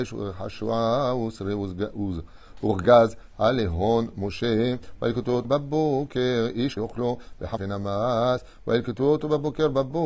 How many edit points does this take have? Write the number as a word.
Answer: three